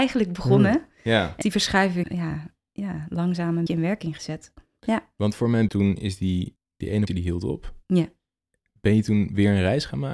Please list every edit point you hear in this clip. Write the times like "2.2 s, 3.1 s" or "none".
1.4 s, 2.0 s, 3.7 s, 5.7 s, 6.6 s, 7.1 s